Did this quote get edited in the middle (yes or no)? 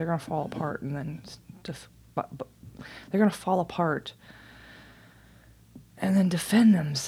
no